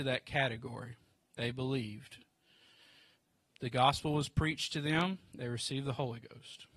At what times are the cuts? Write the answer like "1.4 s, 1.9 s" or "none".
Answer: none